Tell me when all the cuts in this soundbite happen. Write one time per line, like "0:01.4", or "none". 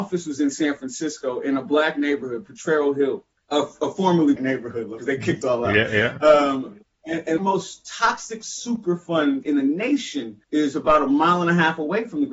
0:03.3
0:04.4
0:05.0
0:05.4
0:07.4
0:09.4
0:10.4